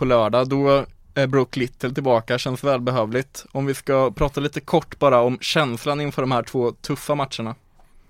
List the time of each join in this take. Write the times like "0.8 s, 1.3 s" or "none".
none